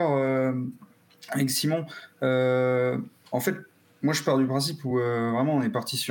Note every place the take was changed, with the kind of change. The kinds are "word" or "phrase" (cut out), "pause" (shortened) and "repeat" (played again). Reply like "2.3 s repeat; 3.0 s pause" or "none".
none